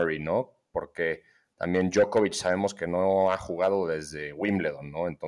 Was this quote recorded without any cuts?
yes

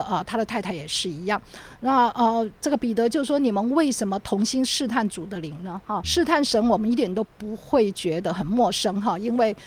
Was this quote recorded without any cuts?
no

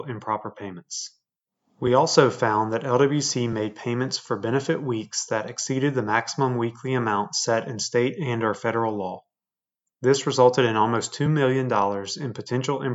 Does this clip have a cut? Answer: no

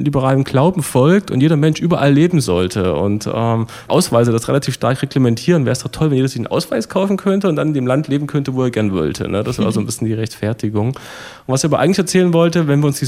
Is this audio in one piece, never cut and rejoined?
no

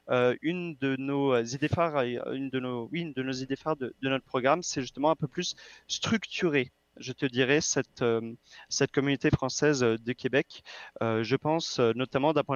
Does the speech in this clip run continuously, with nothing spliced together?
yes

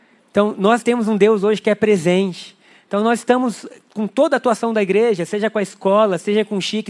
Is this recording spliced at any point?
no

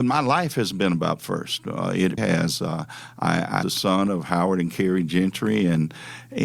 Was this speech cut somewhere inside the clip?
yes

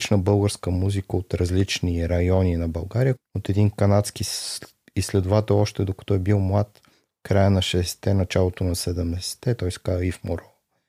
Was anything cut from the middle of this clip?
yes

